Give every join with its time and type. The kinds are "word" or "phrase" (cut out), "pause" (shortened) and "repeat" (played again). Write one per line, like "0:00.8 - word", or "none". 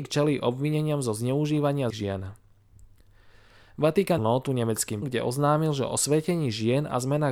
0:01.9 - word
0:04.2 - word
0:05.0 - word